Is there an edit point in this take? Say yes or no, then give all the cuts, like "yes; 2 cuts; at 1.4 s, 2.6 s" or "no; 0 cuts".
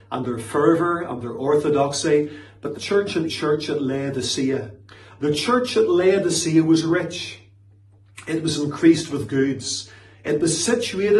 yes; 2 cuts; at 2.8 s, 3.3 s